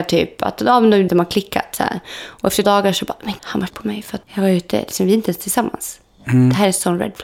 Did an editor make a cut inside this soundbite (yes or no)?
yes